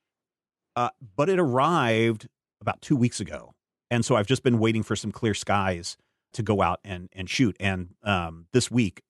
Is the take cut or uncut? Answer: cut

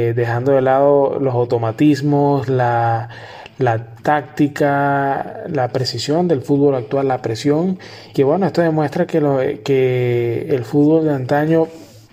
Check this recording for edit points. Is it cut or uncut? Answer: cut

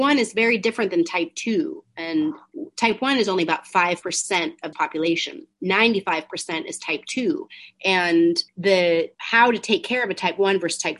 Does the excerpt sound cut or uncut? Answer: cut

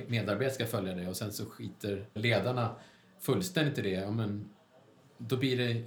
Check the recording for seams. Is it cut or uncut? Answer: cut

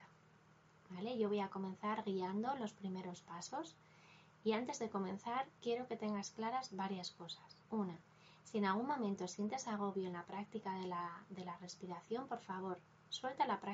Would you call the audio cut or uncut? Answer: cut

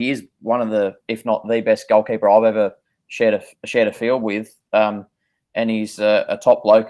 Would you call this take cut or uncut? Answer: uncut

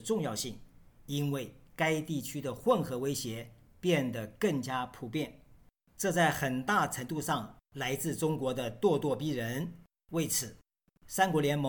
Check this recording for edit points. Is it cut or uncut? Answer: uncut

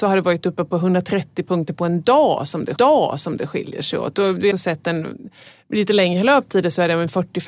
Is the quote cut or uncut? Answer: cut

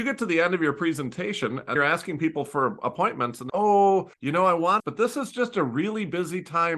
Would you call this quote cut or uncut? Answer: cut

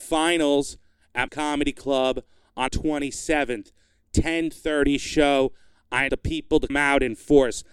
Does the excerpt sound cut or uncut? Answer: cut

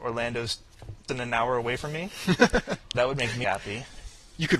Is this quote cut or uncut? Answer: cut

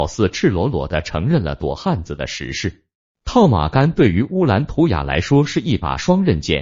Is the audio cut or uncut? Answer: uncut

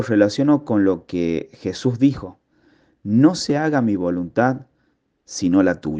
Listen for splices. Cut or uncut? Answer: uncut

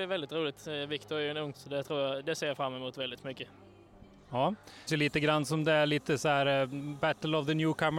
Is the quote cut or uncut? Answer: cut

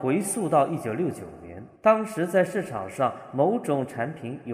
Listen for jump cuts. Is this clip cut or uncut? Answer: cut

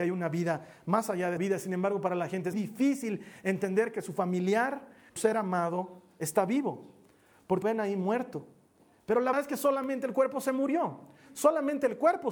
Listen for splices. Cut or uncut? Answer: cut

